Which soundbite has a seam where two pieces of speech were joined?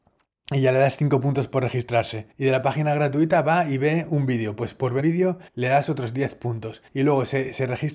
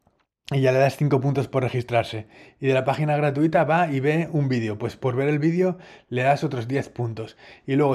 first; 4 cuts; at 2.3 s, 5.0 s, 5.5 s, 6.9 s

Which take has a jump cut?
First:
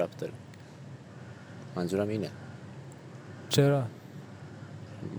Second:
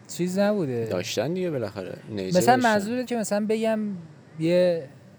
second; 1 cut; at 3.0 s

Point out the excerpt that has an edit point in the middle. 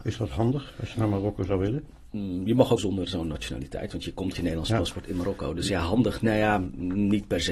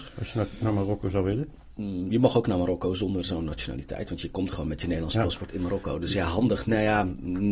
first; 3 cuts; at 0.9 s, 2.8 s, 4.3 s

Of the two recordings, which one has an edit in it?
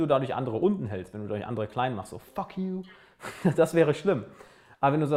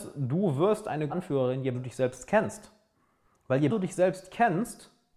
second; 3 cuts; at 1.1 s, 1.7 s, 3.7 s

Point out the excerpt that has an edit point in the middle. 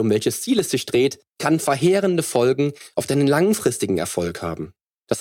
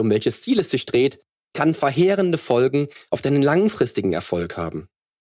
first; 1 cut; at 1.3 s

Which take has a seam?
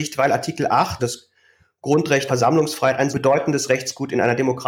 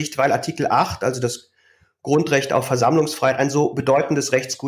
first; 3 cuts; at 1.0 s, 2.3 s, 3.1 s

